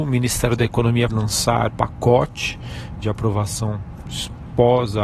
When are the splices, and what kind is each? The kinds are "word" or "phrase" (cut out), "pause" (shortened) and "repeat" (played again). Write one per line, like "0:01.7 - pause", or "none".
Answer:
0:01.1 - word
0:01.7 - word
0:03.0 - word